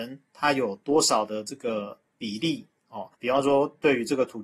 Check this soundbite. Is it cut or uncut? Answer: cut